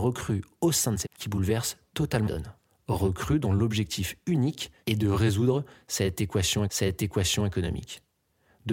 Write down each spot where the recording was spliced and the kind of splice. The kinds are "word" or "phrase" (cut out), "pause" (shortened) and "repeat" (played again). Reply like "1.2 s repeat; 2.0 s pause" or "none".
1.0 s word; 2.2 s word; 4.8 s pause; 6.7 s repeat